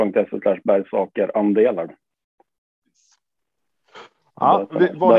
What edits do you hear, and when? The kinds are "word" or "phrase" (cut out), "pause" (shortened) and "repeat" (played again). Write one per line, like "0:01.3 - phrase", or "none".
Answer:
0:01.9 - word

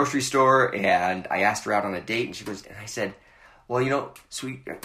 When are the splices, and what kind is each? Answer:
0:02.6 - phrase

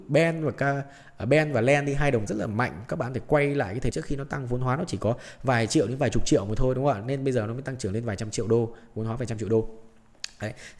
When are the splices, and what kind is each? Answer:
0:02.3 - word
0:03.9 - word

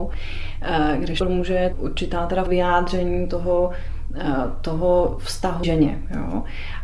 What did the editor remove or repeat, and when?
0:01.2 - phrase
0:01.7 - word
0:02.5 - word
0:05.6 - word

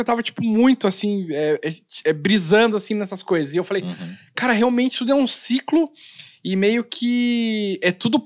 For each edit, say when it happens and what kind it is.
none

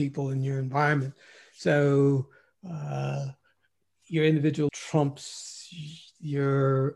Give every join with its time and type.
0:04.7 - word

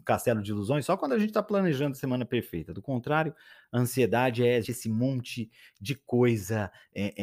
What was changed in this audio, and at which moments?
0:04.6 - word

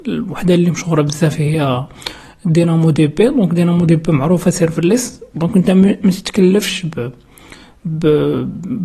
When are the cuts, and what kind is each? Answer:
none

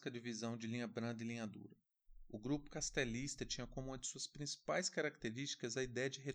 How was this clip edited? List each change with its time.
none

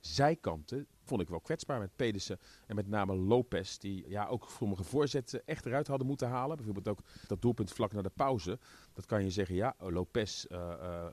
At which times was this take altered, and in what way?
0:01.1 - word
0:04.0 - word
0:07.3 - word

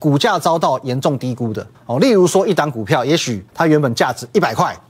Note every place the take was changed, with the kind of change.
0:01.7 - pause
0:03.5 - pause

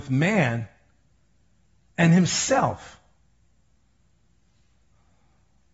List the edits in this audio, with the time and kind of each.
none

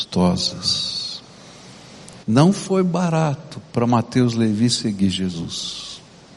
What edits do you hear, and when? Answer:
0:02.2 - pause

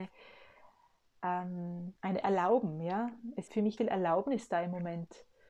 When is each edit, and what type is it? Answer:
0:02.0 - pause
0:03.5 - word
0:03.8 - word

